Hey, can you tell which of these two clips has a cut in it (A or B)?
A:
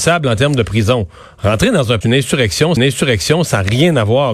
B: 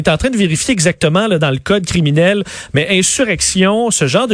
A